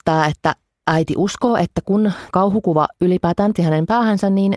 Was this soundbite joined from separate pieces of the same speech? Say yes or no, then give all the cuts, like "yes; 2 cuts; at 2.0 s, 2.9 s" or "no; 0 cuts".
yes; 2 cuts; at 2.3 s, 3.6 s